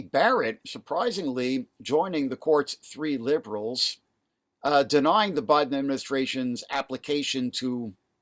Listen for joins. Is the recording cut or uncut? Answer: uncut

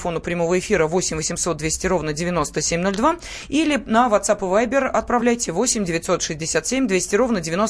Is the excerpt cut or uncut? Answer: uncut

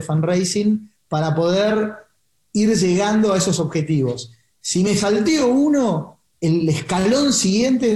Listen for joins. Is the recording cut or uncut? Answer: uncut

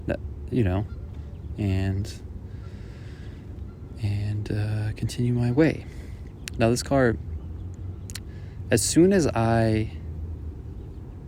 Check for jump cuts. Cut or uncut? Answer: uncut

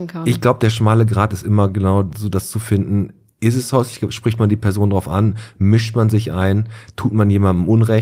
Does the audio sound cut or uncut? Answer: uncut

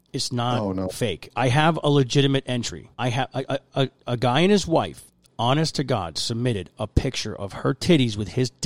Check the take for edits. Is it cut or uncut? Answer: cut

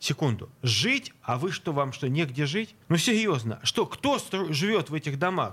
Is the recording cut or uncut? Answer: cut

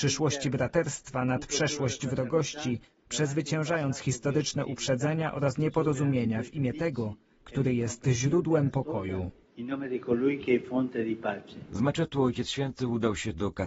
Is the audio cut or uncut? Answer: uncut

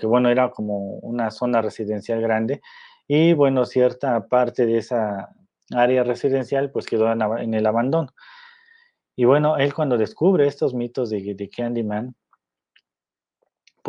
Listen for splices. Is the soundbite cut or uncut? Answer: uncut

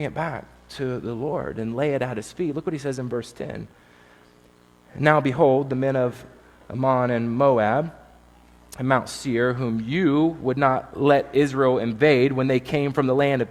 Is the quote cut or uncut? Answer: uncut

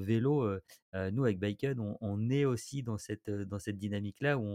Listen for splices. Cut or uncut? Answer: uncut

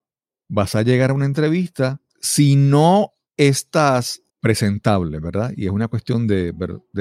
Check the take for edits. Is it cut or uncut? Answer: cut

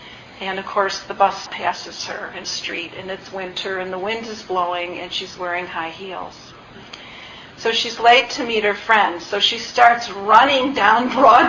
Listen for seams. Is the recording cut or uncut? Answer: cut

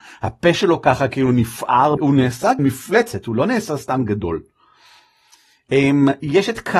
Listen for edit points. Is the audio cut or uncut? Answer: cut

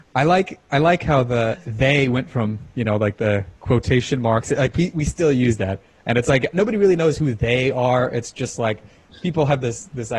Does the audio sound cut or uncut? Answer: uncut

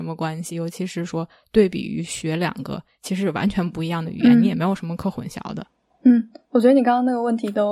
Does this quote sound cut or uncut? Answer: uncut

